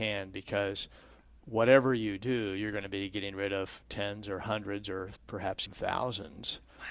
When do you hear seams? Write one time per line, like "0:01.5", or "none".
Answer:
0:05.7